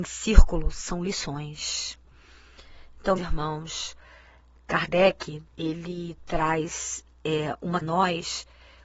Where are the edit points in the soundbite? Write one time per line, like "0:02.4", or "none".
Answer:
0:03.2
0:05.5
0:07.8